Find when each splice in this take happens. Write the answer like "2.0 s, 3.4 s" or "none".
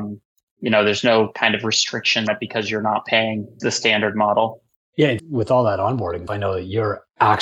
2.3 s, 3.6 s, 5.2 s, 6.3 s